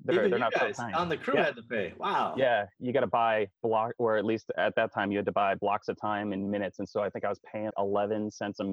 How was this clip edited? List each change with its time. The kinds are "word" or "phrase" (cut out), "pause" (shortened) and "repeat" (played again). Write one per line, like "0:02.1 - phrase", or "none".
0:04.5 - word
0:07.7 - word